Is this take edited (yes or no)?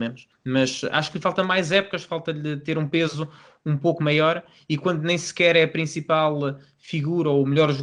no